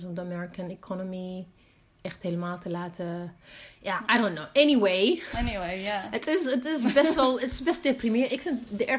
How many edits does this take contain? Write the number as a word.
zero